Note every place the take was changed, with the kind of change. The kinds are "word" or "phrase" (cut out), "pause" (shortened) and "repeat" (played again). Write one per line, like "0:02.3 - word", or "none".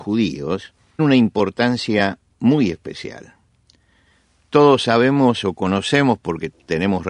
0:01.0 - word